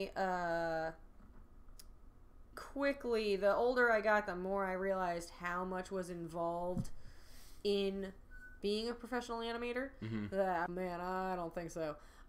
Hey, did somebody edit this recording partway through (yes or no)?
yes